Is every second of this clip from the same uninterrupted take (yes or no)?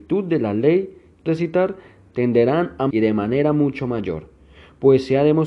no